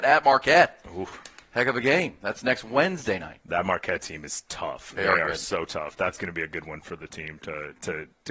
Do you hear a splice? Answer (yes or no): no